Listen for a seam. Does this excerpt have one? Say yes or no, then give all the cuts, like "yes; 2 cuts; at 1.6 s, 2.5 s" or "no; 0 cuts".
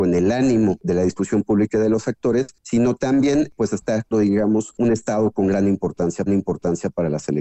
yes; 2 cuts; at 4.1 s, 6.3 s